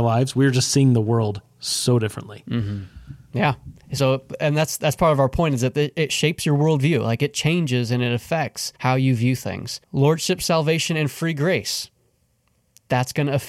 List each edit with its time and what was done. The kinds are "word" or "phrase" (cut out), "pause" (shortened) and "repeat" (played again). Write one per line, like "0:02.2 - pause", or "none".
0:08.8 - pause
0:09.8 - pause